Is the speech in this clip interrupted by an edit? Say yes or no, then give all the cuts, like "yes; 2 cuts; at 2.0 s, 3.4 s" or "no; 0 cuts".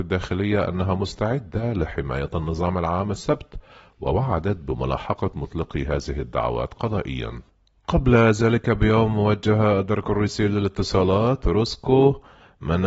no; 0 cuts